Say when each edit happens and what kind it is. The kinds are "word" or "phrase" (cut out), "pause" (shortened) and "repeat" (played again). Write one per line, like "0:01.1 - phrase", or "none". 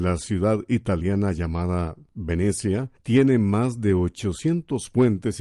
none